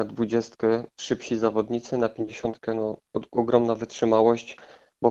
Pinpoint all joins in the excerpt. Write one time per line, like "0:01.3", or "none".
0:00.9